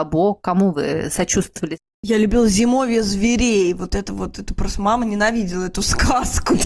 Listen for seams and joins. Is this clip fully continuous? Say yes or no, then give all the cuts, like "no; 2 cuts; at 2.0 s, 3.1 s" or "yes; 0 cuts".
yes; 0 cuts